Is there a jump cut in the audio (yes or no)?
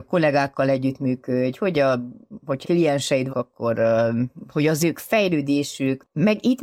yes